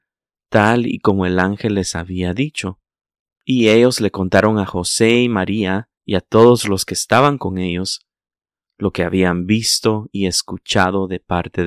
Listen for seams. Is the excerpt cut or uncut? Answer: cut